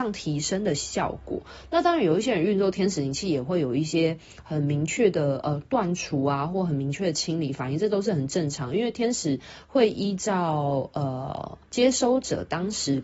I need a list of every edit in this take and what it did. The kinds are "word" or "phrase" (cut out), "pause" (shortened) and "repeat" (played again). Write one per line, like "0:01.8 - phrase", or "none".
0:11.6 - pause